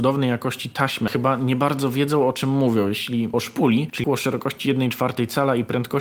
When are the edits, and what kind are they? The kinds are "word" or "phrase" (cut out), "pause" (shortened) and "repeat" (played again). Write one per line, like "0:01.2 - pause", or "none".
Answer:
0:01.1 - word
0:03.3 - word
0:04.0 - word